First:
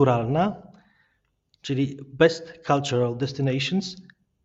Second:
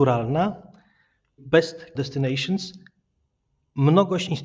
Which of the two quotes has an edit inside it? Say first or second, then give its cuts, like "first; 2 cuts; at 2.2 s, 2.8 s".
second; 2 cuts; at 1.4 s, 1.9 s